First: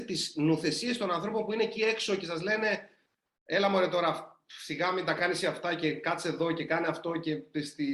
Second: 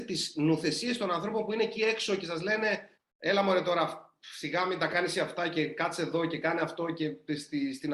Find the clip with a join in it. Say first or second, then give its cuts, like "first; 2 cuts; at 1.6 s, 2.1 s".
second; 1 cut; at 3.0 s